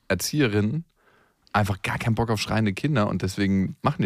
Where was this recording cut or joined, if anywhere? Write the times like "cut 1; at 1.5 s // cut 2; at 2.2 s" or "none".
none